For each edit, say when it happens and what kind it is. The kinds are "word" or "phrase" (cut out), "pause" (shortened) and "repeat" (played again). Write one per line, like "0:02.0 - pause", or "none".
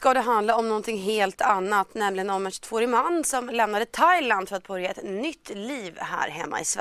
none